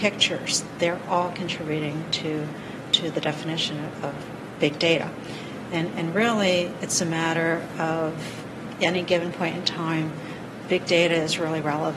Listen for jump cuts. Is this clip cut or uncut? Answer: uncut